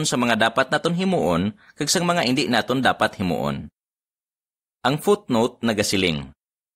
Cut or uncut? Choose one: uncut